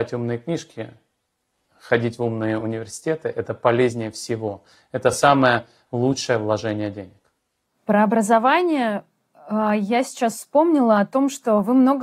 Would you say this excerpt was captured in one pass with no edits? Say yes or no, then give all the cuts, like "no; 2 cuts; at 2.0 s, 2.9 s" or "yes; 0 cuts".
yes; 0 cuts